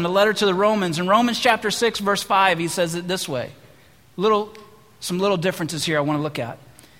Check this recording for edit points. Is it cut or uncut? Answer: uncut